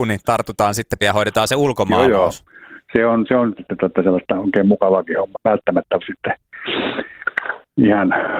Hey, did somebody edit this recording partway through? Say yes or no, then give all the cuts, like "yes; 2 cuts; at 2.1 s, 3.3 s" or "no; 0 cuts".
yes; 4 cuts; at 1.0 s, 3.6 s, 5.3 s, 6.0 s